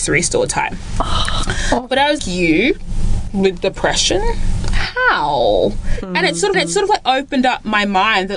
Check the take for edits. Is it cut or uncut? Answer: cut